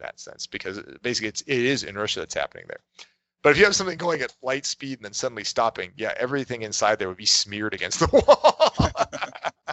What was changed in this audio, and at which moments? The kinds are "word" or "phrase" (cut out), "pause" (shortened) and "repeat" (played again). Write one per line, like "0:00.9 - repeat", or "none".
none